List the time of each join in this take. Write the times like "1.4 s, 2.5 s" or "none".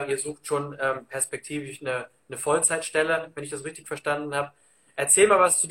none